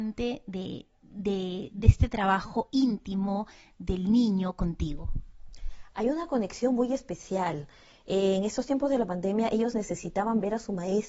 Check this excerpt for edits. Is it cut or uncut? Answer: uncut